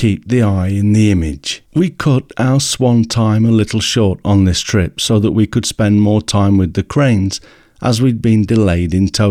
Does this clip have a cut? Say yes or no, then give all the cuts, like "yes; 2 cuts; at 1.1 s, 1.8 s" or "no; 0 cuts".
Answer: yes; 1 cut; at 1.7 s